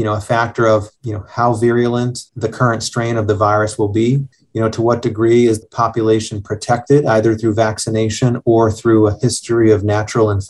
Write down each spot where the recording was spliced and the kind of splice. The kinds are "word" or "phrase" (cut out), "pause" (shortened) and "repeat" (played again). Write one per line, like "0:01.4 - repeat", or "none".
0:02.3 - pause
0:04.3 - pause
0:05.6 - word